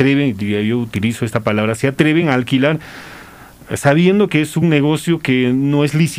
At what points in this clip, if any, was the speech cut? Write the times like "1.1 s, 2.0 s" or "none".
none

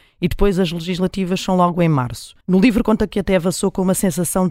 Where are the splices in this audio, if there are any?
2.4 s

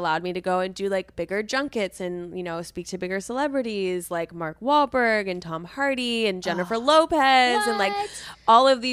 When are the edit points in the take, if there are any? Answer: none

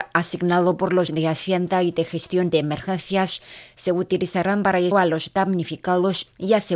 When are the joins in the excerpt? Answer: 1.1 s, 4.9 s

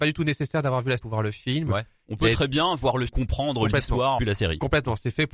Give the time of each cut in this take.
1.0 s, 3.1 s, 4.2 s

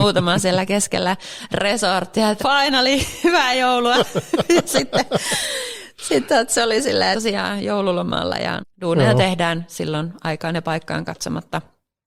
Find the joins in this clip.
2.4 s, 7.1 s, 8.6 s

